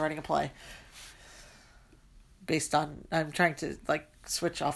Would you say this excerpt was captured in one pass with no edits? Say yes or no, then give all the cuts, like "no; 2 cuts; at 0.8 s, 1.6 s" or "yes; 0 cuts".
yes; 0 cuts